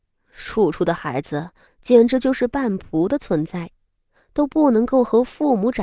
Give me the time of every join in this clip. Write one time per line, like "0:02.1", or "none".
none